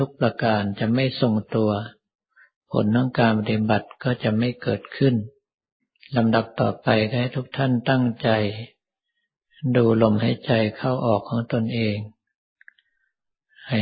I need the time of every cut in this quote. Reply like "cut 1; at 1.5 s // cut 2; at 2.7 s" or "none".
cut 1; at 5.8 s